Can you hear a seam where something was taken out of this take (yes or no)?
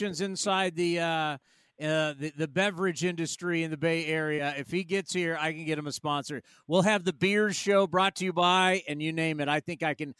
no